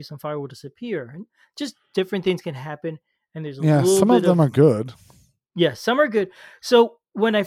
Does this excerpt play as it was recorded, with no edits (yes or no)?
yes